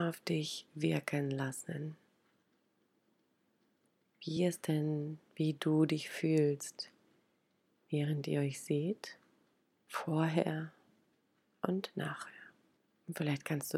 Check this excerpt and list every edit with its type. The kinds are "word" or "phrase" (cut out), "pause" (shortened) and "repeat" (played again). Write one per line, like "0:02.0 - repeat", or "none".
none